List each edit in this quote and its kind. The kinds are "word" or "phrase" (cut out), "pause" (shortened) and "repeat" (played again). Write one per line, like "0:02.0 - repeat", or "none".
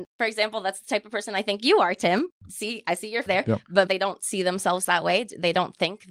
0:03.3 - word
0:03.9 - phrase